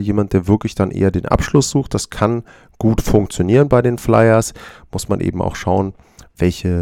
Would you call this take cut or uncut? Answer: uncut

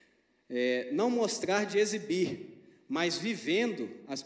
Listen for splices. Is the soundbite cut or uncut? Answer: uncut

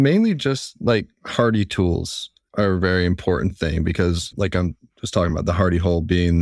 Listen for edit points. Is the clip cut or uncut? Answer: uncut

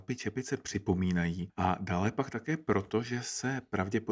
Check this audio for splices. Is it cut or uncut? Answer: uncut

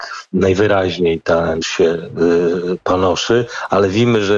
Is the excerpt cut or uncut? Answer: cut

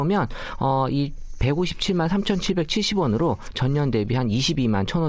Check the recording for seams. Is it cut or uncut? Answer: uncut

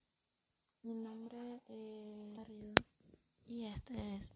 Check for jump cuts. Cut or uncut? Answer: cut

